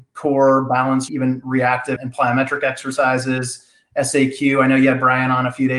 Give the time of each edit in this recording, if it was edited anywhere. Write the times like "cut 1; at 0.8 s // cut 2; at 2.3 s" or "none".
cut 1; at 1.1 s // cut 2; at 2.0 s